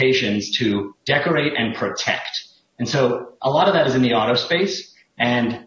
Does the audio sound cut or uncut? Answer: uncut